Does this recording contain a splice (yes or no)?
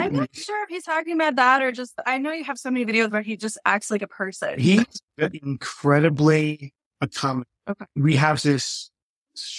yes